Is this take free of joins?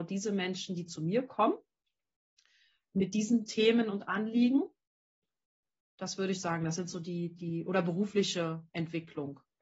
yes; 0 cuts

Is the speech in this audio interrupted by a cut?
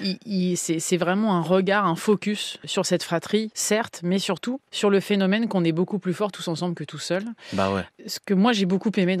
no; 0 cuts

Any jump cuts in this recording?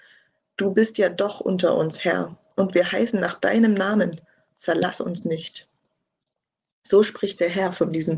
no; 0 cuts

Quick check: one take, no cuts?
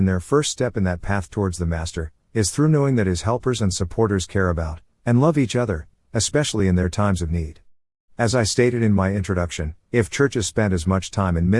yes; 0 cuts

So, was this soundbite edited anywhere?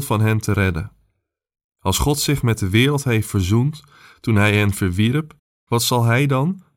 no; 0 cuts

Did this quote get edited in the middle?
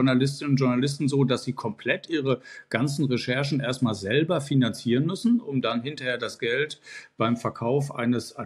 no; 0 cuts

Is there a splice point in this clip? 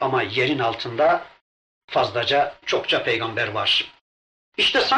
no; 0 cuts

